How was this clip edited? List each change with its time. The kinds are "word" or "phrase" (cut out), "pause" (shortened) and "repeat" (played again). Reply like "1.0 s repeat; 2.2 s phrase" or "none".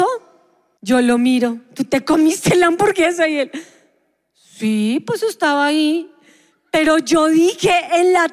none